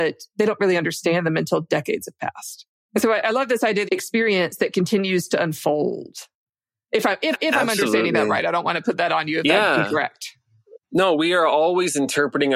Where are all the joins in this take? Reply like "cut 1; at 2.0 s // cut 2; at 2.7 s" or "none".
cut 1; at 3.9 s // cut 2; at 7.3 s // cut 3; at 10.8 s